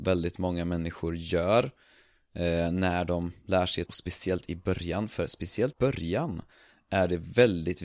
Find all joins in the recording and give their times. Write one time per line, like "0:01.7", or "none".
0:03.9
0:05.7